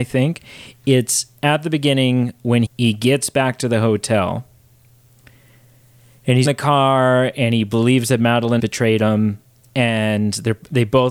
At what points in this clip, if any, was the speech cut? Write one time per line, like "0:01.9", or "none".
0:02.6
0:06.4
0:08.6